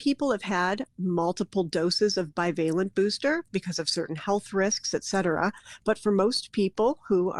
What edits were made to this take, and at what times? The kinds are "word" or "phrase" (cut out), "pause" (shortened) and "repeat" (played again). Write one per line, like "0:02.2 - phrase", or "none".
none